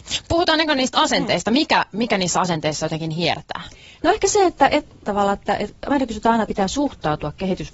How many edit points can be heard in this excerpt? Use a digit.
2